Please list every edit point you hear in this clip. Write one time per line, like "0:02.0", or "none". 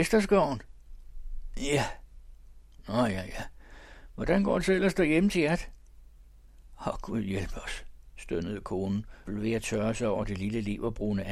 0:09.3